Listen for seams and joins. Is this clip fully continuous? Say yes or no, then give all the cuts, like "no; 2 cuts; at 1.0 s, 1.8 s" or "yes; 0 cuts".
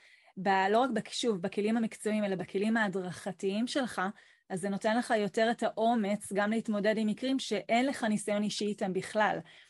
yes; 0 cuts